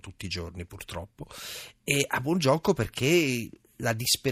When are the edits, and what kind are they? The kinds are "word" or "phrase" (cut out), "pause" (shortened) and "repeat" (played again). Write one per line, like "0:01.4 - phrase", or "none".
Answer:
none